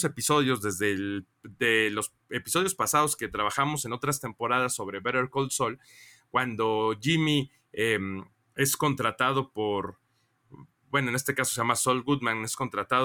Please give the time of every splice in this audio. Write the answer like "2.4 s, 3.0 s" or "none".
none